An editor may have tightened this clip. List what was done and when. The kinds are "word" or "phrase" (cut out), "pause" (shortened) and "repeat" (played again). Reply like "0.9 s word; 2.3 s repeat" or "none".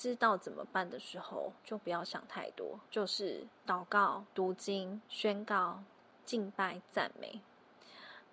1.6 s pause; 2.9 s pause; 3.5 s pause; 4.3 s pause; 5.1 s pause